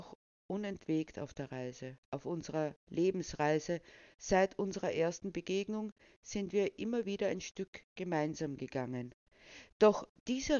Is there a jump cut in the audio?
yes; 2 cuts; at 2.0 s, 2.8 s

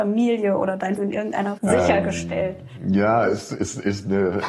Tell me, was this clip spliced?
yes; 2 cuts; at 1.0 s, 1.6 s

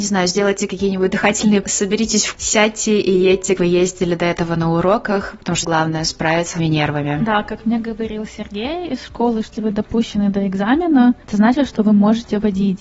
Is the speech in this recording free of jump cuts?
no; 6 cuts; at 1.6 s, 2.3 s, 3.6 s, 5.6 s, 6.6 s, 9.5 s

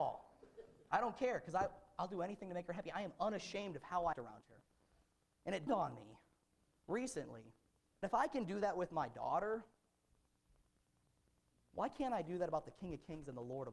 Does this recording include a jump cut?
yes; 3 cuts; at 4.1 s, 5.7 s, 8.0 s

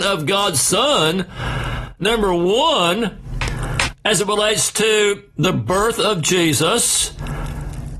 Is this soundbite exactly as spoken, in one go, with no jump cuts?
yes; 0 cuts

